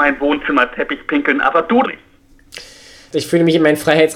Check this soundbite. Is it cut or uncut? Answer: cut